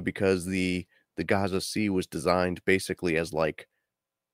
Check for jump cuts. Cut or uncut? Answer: uncut